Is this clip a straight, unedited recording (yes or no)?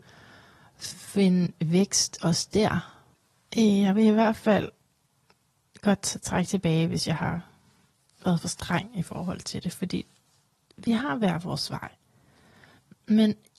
yes